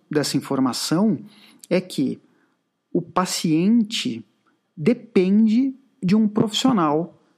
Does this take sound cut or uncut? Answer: uncut